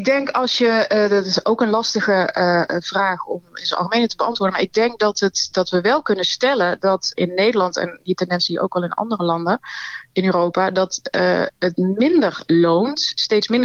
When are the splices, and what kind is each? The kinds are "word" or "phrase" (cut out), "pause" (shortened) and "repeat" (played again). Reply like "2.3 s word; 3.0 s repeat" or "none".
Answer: 7.2 s word

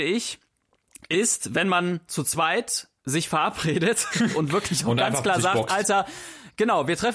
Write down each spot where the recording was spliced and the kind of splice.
3.0 s pause

